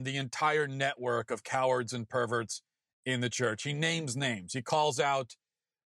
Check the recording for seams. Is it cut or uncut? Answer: uncut